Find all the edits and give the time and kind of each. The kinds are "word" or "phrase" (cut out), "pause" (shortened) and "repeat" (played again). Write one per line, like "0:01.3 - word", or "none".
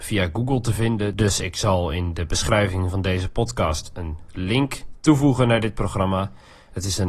none